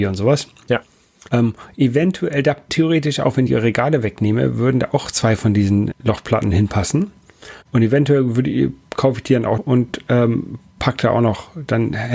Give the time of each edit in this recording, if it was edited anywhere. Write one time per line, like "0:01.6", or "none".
0:01.3
0:02.7
0:03.5
0:05.9
0:07.6
0:09.6